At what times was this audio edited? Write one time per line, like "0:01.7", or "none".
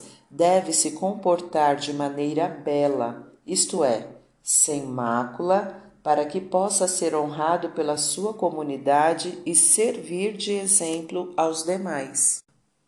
none